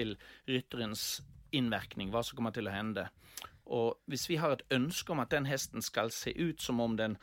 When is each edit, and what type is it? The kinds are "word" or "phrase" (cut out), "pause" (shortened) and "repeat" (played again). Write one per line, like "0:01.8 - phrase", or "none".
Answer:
none